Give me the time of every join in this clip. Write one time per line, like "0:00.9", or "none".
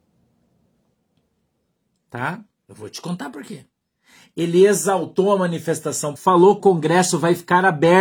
0:03.8
0:06.2
0:06.6